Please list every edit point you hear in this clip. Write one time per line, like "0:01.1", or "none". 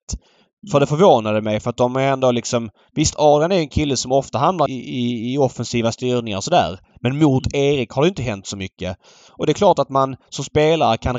0:04.7